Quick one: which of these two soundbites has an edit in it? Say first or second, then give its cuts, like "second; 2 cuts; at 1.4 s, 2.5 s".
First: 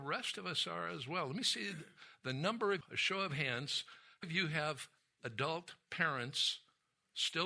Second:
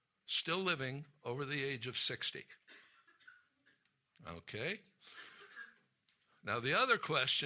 first; 2 cuts; at 2.8 s, 4.2 s